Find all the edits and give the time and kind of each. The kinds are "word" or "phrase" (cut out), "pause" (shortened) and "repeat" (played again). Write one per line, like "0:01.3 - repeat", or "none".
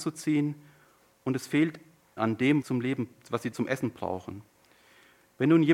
0:02.2 - word
0:02.6 - phrase
0:03.5 - word